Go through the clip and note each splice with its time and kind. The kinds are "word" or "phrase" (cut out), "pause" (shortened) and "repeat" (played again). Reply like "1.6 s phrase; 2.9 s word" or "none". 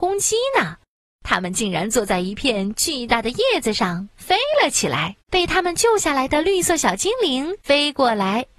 5.2 s pause; 7.6 s pause